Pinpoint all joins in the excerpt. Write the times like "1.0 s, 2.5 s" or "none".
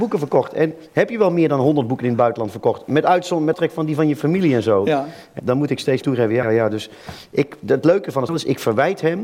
3.5 s, 5.4 s, 6.0 s, 6.4 s, 8.3 s